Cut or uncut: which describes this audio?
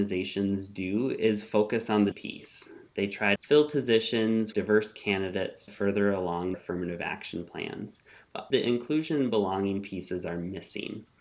cut